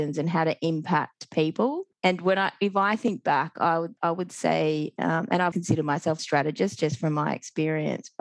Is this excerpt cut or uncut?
cut